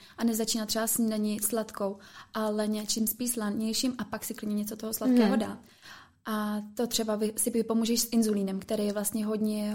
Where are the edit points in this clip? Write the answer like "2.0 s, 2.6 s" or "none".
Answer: none